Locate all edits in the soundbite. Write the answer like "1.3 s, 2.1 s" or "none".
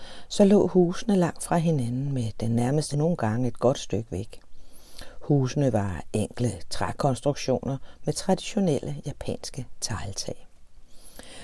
2.9 s